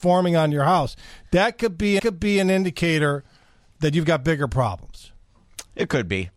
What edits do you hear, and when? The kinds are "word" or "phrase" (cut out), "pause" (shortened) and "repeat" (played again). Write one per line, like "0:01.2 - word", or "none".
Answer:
0:02.0 - repeat